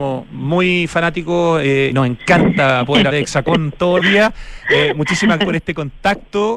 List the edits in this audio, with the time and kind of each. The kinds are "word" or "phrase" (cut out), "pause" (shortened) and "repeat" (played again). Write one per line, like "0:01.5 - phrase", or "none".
0:01.9 - word
0:03.1 - word
0:04.0 - word
0:05.4 - word